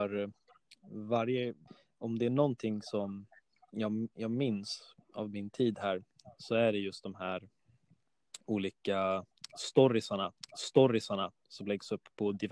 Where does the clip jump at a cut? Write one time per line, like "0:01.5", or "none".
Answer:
0:01.7
0:08.4
0:10.4

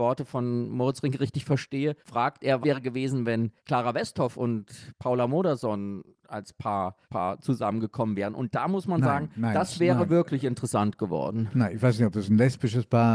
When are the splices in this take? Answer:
0:02.0
0:02.6
0:03.6
0:07.0

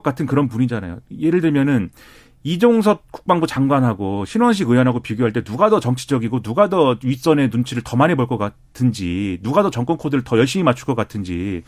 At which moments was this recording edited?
none

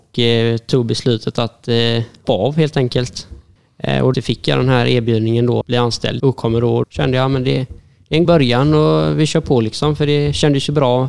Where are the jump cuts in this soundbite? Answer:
0:02.2
0:04.1
0:05.6
0:06.2
0:06.8
0:08.2

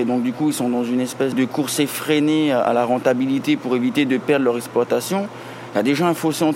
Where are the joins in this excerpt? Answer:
0:01.3

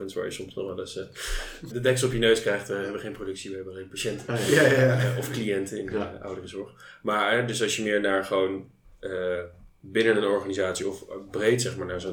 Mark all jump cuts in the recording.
0:01.7

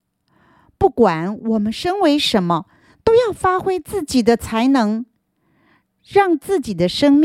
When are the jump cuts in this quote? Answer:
none

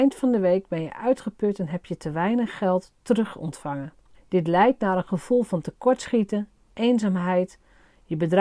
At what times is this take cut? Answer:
0:04.1

